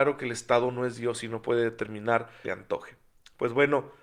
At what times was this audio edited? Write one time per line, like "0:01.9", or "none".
0:02.4